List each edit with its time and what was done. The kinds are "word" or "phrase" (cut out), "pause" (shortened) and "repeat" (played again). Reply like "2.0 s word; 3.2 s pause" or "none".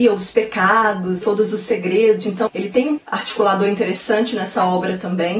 1.2 s word; 2.5 s word; 3.0 s word